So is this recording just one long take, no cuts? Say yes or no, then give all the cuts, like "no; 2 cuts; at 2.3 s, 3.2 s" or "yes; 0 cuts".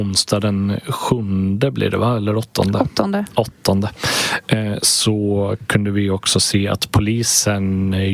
yes; 0 cuts